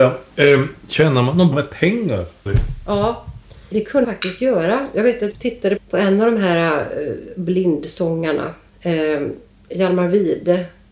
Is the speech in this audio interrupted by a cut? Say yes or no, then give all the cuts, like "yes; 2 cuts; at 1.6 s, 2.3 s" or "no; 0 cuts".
yes; 6 cuts; at 1.5 s, 2.5 s, 3.7 s, 4.0 s, 5.3 s, 5.8 s